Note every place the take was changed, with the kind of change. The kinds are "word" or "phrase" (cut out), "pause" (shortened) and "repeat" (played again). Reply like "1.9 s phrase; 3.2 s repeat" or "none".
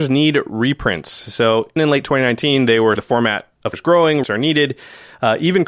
1.8 s word; 3.0 s word; 3.7 s word; 4.2 s word